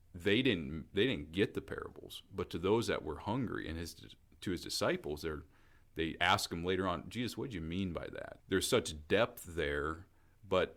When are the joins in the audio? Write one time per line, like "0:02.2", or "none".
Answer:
0:08.4